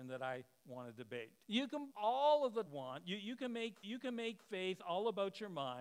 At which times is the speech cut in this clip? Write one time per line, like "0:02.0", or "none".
0:01.4
0:01.9
0:02.7
0:03.8